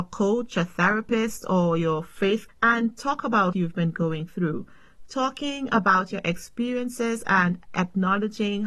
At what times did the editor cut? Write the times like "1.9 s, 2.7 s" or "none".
2.5 s, 3.5 s